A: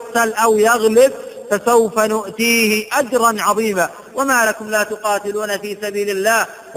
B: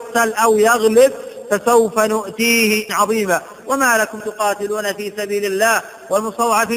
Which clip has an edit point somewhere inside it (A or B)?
B